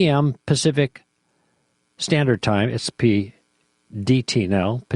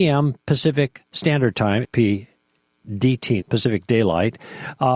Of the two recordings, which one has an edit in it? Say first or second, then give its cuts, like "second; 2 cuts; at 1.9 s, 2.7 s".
second; 3 cuts; at 1.1 s, 1.8 s, 3.4 s